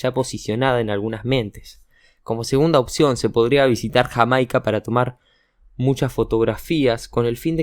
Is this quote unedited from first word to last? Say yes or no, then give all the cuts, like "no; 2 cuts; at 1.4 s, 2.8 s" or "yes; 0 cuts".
yes; 0 cuts